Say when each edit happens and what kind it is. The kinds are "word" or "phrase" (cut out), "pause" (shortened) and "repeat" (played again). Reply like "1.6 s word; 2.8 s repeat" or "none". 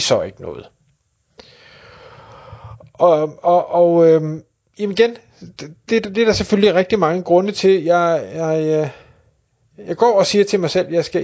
none